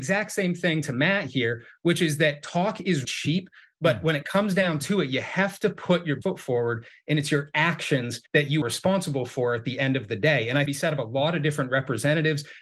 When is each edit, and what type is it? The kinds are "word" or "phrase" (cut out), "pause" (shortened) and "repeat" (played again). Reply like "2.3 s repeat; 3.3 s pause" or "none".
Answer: 3.0 s word; 6.2 s word; 8.3 s pause; 8.6 s word; 10.7 s phrase